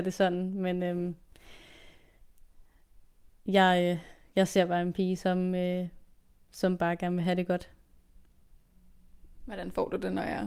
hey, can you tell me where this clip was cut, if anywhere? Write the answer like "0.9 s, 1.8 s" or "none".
none